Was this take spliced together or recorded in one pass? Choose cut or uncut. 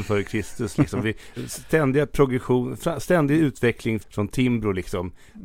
cut